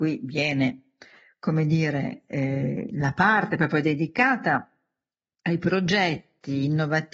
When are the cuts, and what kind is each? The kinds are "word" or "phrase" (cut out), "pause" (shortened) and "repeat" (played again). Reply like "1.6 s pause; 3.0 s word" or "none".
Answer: none